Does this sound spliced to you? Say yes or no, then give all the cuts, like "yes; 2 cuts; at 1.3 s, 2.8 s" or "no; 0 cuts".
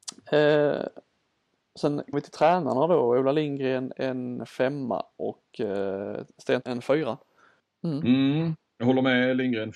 yes; 3 cuts; at 2.1 s, 6.6 s, 7.6 s